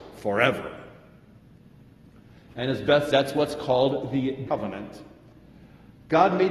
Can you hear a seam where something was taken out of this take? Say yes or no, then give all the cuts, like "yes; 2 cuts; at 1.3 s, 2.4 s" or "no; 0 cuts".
yes; 2 cuts; at 3.1 s, 4.5 s